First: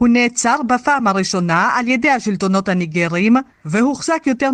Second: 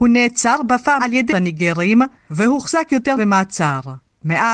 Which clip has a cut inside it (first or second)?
second